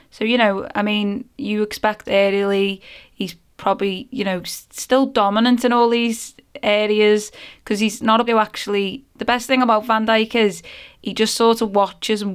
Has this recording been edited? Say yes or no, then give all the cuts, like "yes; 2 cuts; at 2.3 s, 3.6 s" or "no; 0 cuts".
yes; 2 cuts; at 2.1 s, 8.3 s